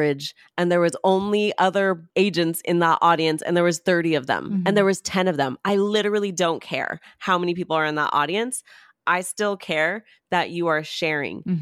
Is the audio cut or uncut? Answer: uncut